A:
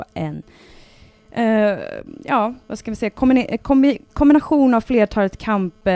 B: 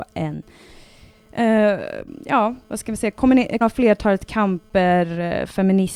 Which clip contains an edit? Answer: B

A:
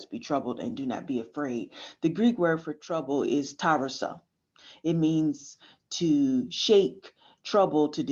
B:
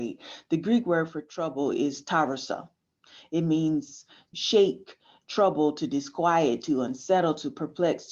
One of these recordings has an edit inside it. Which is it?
B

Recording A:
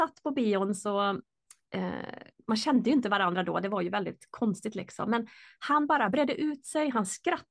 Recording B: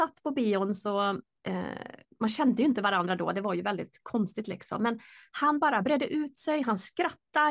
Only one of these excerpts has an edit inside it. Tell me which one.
B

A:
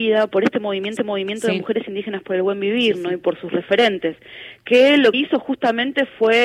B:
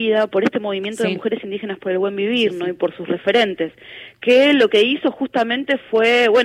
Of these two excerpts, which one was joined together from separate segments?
A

